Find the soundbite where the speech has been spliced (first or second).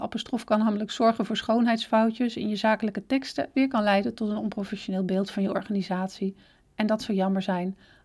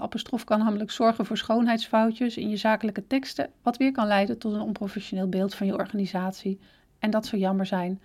first